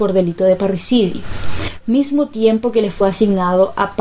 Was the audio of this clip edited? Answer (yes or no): no